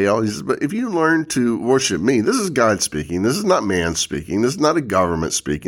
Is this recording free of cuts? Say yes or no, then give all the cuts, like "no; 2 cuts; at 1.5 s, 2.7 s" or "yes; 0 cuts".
yes; 0 cuts